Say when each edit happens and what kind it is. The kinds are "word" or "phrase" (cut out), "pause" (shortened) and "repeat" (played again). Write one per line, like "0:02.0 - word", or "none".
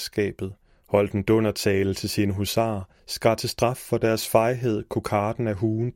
0:03.0 - pause